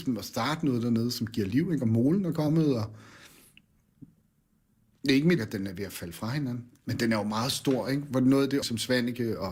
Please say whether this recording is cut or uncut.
cut